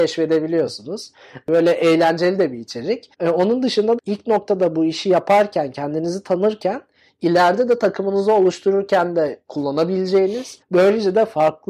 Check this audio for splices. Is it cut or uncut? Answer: cut